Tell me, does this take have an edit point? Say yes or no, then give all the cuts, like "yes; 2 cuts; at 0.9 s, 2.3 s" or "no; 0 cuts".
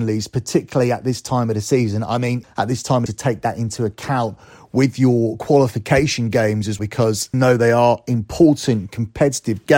yes; 4 cuts; at 2.4 s, 3.1 s, 6.8 s, 7.3 s